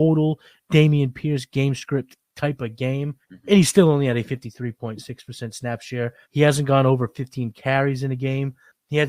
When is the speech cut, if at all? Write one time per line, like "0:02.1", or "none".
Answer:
0:03.2
0:06.2